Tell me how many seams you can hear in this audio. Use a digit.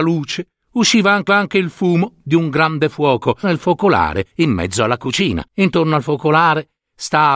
4